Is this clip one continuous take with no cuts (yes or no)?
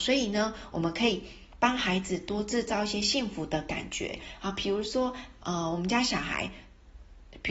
yes